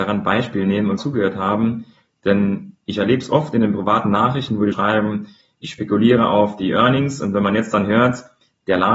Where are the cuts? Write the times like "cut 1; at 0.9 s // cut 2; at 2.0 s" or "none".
cut 1; at 1.0 s // cut 2; at 4.7 s